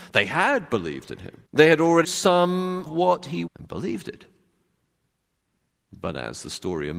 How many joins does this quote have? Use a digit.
4